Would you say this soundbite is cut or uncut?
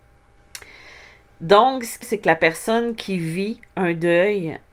cut